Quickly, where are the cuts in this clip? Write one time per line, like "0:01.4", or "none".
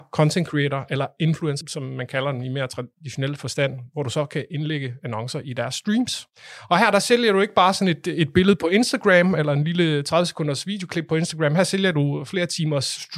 0:01.6